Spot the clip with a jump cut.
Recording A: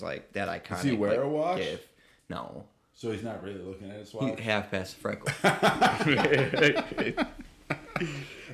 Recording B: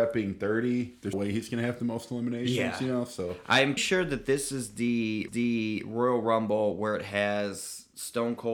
B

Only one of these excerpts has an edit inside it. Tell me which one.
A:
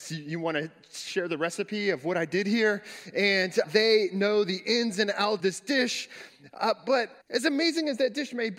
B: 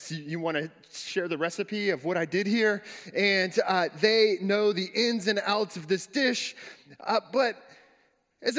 A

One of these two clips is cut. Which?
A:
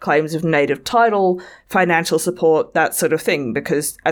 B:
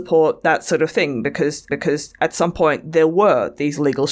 B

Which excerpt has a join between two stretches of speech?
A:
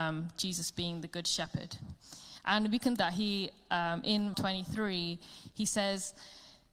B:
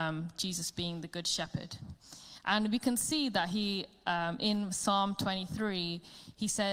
A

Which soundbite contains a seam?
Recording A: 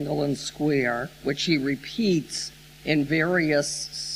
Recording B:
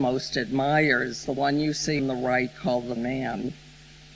B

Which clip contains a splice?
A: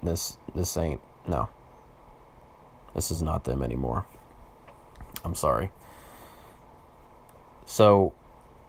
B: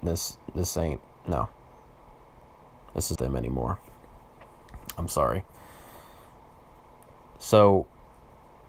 B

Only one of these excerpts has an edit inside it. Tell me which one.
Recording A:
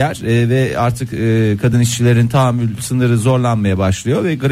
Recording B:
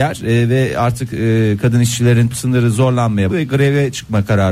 B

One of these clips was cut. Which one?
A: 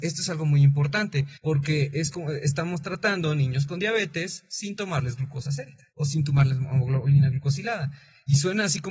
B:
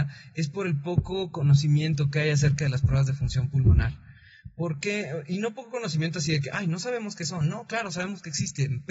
A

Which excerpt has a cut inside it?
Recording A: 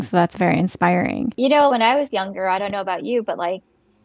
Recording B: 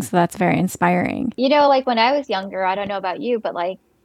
A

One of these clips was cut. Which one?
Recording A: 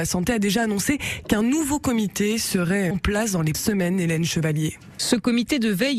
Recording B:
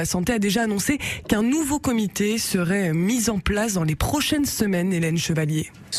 A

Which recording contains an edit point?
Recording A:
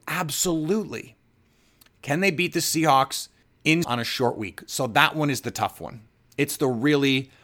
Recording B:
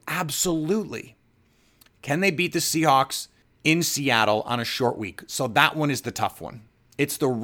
A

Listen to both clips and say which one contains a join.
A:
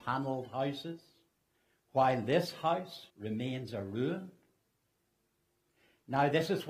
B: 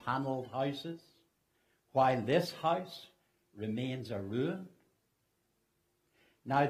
A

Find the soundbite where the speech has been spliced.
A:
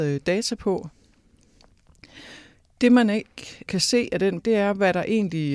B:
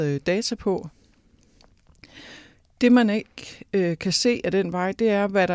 A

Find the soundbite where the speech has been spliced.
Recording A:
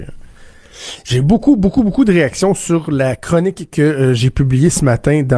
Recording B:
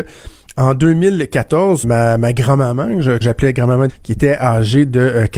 B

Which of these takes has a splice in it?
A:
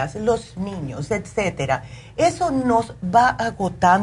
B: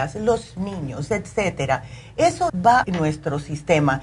B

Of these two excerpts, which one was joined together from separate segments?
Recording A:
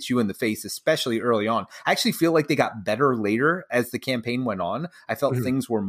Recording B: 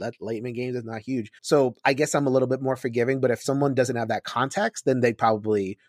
B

